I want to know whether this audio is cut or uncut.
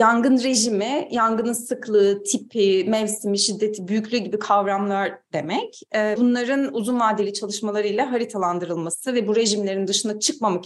cut